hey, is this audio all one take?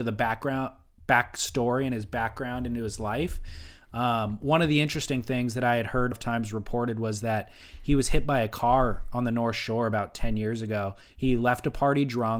no; 1 cut; at 6.1 s

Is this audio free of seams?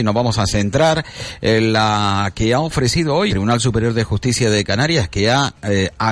no; 1 cut; at 3.3 s

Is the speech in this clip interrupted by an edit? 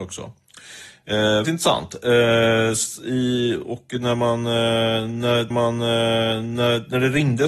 yes; 2 cuts; at 1.4 s, 5.5 s

